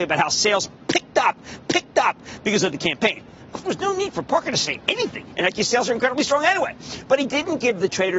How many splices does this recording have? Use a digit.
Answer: 4